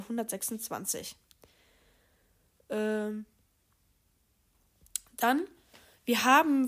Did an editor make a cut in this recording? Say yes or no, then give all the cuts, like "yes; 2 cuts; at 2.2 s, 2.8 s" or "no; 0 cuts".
no; 0 cuts